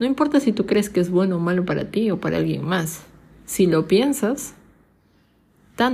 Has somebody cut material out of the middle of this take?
no; 0 cuts

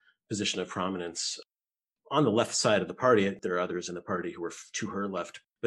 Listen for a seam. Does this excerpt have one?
no; 0 cuts

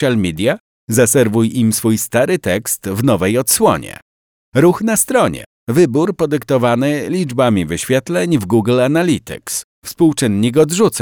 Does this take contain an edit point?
no; 0 cuts

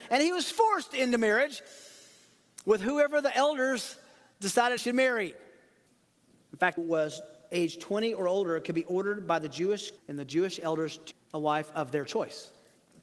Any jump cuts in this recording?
yes; 5 cuts; at 4.8 s, 5.9 s, 6.8 s, 10.0 s, 11.1 s

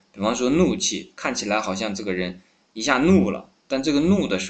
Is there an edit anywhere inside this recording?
yes; 1 cut; at 2.5 s

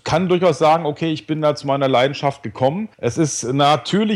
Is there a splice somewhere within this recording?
yes; 1 cut; at 2.9 s

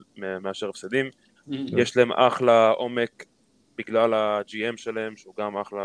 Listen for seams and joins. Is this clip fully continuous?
yes; 0 cuts

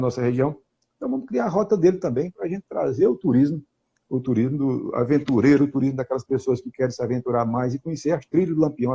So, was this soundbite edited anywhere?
no; 0 cuts

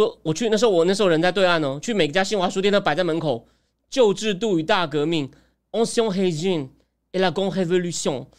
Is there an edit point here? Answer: no; 0 cuts

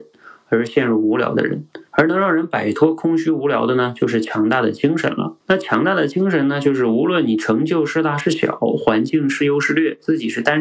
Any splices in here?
yes; 2 cuts; at 1.9 s, 5.4 s

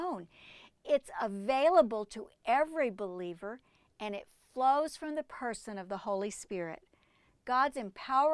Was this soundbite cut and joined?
no; 0 cuts

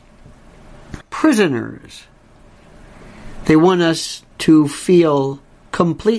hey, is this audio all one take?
no; 2 cuts; at 1.0 s, 4.3 s

